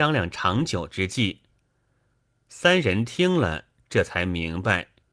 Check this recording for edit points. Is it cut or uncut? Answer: uncut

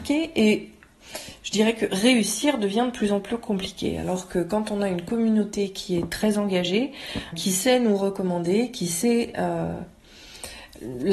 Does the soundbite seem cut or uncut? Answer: cut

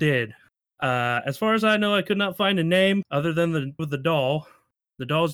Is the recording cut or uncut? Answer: cut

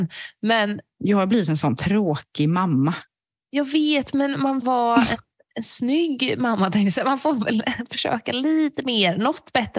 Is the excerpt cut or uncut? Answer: cut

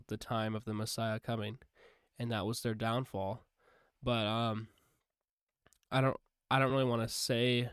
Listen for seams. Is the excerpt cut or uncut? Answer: uncut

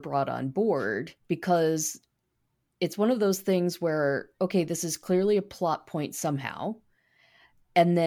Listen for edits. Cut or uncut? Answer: cut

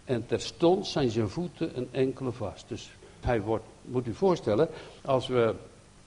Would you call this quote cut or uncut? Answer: cut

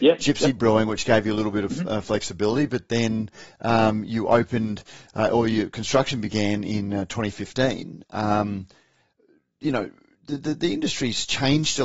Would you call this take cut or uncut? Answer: uncut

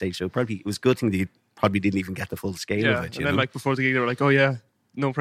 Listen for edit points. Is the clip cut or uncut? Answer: uncut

